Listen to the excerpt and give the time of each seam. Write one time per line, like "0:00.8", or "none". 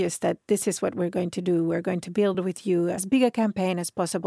none